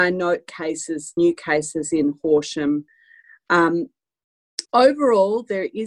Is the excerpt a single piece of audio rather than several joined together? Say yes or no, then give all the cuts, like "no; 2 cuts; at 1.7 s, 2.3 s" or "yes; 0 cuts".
no; 2 cuts; at 1.2 s, 4.6 s